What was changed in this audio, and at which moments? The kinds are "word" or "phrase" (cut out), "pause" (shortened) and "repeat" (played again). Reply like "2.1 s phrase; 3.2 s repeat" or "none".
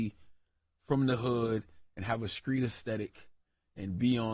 none